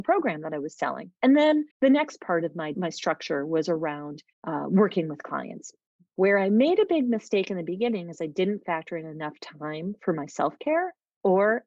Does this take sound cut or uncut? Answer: cut